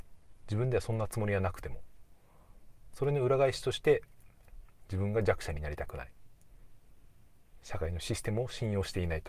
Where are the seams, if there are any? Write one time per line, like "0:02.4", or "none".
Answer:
0:07.6